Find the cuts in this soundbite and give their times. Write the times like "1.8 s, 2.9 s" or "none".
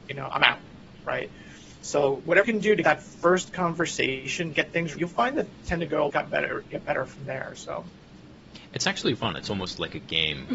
2.4 s, 2.8 s, 4.5 s, 4.9 s, 5.6 s, 6.1 s, 9.2 s